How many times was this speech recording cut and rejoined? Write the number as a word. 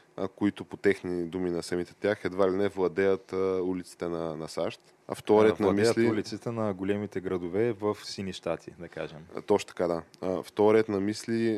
one